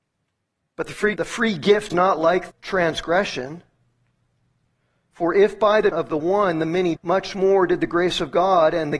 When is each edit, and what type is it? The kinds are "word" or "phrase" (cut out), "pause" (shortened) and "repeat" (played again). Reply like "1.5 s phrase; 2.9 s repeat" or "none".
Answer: 1.2 s word; 1.9 s word; 2.5 s word; 5.9 s word; 7.0 s word